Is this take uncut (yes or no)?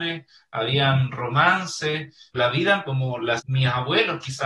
no